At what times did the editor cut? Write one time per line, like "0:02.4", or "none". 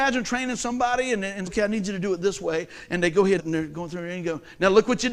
0:01.5
0:03.4

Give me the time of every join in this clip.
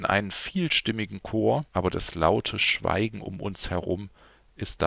0:01.7

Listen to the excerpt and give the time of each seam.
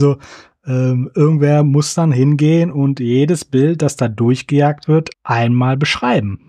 0:05.1

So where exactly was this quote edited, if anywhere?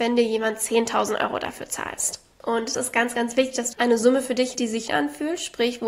0:02.7
0:03.7
0:04.5
0:04.9

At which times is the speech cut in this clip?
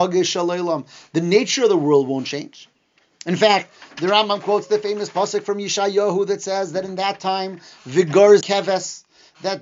0:08.4

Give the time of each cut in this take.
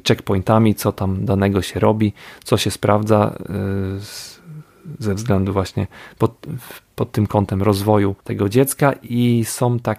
0:08.2

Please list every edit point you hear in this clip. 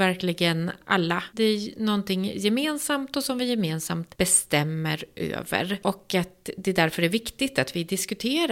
none

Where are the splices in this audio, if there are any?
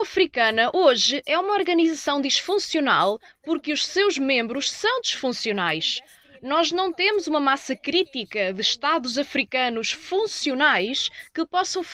none

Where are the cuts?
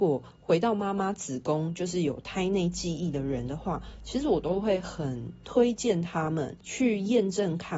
0:06.6

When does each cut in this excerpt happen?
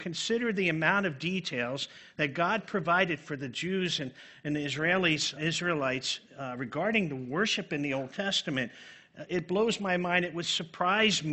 0:05.4
0:09.3

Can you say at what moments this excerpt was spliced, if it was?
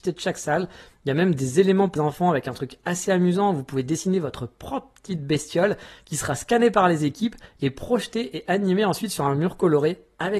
0:02.0

